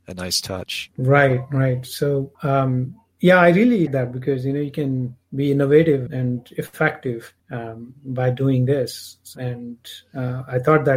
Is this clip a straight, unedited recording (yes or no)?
no